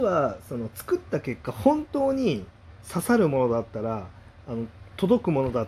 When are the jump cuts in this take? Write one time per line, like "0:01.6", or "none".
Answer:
0:02.8